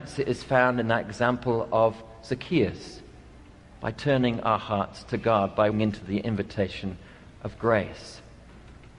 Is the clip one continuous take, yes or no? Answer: no